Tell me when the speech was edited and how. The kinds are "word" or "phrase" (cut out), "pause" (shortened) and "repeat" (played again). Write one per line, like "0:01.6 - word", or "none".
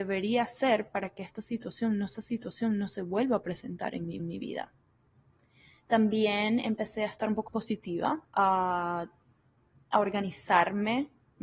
0:02.2 - repeat
0:04.2 - repeat
0:07.5 - word
0:08.2 - pause